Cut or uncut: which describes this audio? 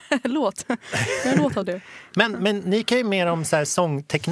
uncut